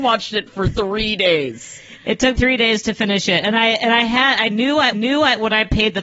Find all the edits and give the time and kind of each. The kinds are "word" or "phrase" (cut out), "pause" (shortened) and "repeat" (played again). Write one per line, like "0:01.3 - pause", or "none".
0:02.4 - word
0:04.9 - repeat